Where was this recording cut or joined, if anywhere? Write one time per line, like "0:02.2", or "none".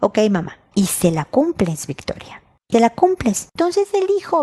0:02.7